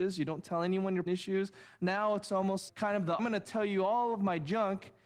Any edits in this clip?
yes; 3 cuts; at 1.1 s, 2.7 s, 3.2 s

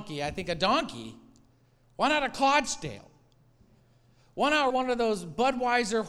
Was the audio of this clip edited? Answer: yes; 1 cut; at 4.7 s

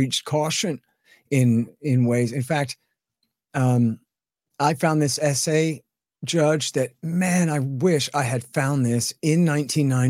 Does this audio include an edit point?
no; 0 cuts

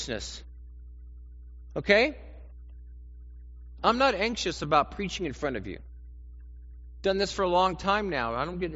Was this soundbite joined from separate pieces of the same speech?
no; 0 cuts

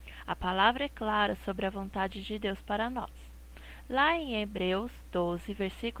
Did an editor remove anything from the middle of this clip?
no; 0 cuts

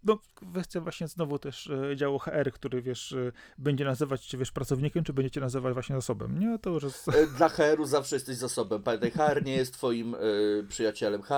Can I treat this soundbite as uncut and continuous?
yes; 0 cuts

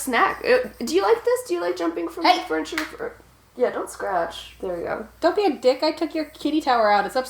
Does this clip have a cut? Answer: no; 0 cuts

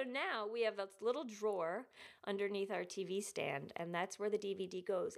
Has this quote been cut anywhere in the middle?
no; 0 cuts

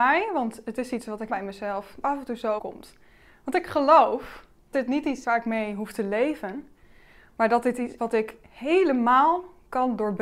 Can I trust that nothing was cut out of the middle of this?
no; 6 cuts; at 1.3 s, 2.0 s, 2.6 s, 4.7 s, 5.2 s, 8.0 s

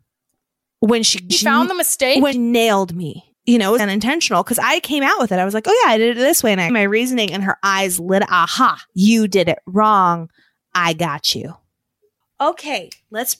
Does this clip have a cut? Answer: yes; 6 cuts; at 1.3 s, 2.3 s, 3.3 s, 3.8 s, 6.7 s, 8.9 s

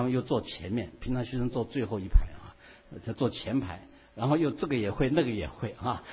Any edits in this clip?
no; 0 cuts

